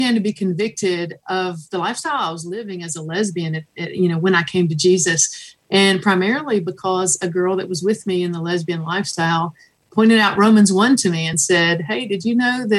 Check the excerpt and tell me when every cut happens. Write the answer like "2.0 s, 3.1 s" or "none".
none